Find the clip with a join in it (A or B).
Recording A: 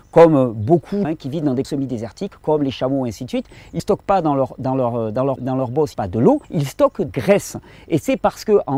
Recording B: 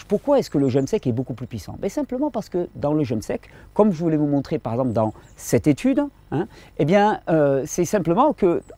A